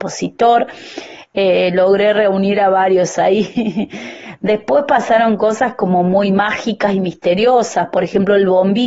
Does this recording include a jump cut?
no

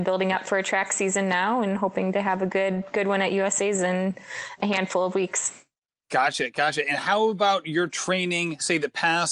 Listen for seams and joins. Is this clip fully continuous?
yes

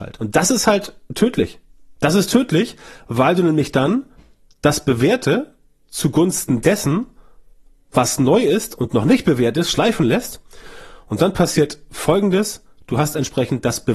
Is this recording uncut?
yes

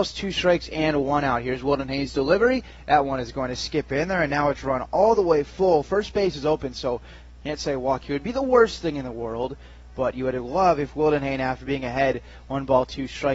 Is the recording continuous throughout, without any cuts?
yes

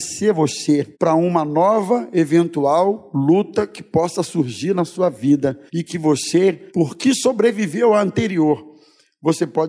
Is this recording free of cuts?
no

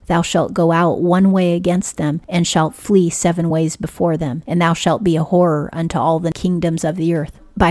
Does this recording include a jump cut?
no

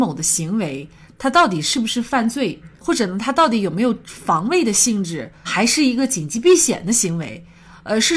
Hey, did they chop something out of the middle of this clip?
yes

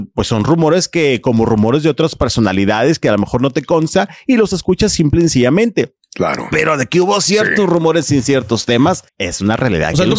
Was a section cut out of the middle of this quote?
yes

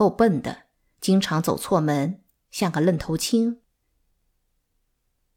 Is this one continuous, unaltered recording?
yes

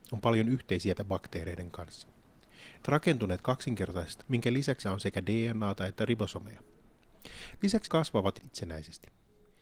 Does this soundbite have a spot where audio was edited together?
yes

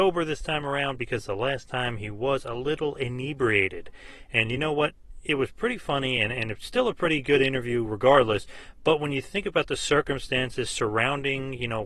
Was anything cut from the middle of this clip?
no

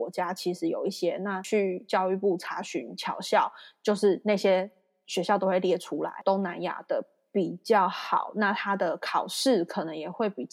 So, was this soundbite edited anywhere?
no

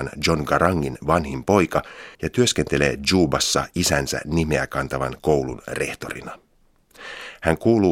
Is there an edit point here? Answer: yes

